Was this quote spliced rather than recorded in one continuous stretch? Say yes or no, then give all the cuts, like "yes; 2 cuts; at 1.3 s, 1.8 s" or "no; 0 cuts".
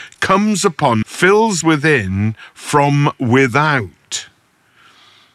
yes; 2 cuts; at 1.0 s, 1.6 s